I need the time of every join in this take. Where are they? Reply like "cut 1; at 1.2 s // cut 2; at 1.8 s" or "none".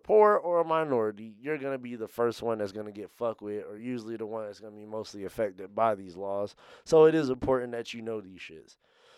none